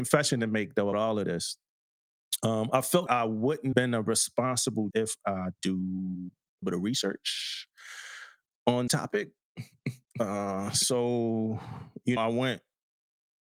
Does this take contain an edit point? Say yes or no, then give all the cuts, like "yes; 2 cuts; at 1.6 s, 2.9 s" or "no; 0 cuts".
yes; 8 cuts; at 0.9 s, 3.1 s, 3.7 s, 4.9 s, 5.6 s, 6.6 s, 8.9 s, 12.2 s